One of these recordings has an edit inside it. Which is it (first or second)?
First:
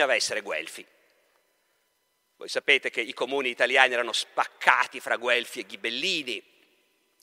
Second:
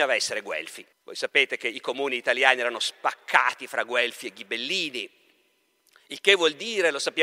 second